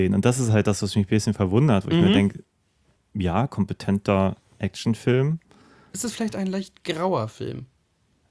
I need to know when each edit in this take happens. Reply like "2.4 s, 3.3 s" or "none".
none